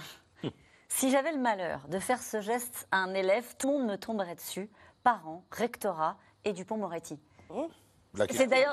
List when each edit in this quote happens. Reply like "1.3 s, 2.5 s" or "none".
3.6 s